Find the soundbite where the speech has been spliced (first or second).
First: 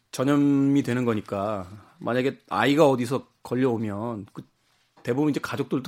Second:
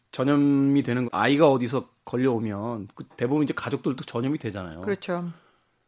second